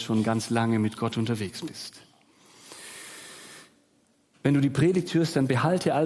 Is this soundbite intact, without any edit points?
yes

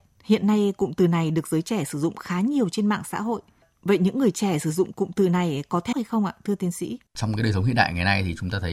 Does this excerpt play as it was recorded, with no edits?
no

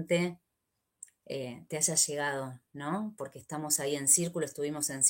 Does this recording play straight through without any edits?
yes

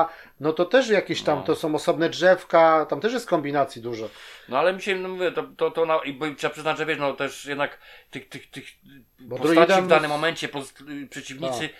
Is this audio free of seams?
yes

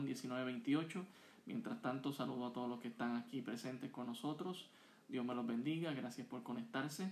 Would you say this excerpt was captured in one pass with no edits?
yes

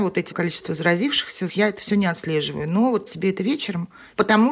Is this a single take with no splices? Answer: no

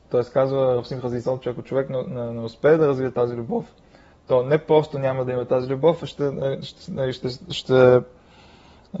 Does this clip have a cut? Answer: no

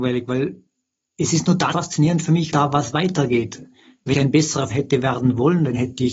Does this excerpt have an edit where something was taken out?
yes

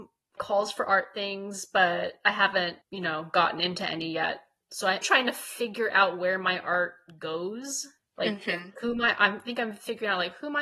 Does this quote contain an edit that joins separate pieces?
yes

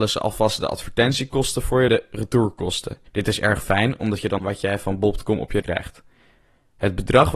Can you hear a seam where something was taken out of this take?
yes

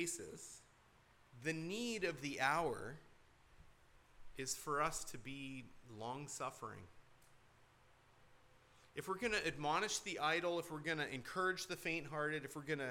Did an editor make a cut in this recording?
no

